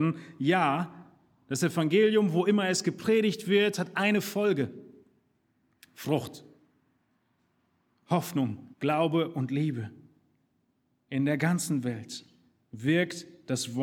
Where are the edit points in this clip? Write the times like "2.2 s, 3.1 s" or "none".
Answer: 8.7 s